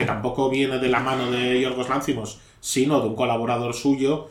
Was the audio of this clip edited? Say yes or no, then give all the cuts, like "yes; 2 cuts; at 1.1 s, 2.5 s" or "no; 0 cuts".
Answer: no; 0 cuts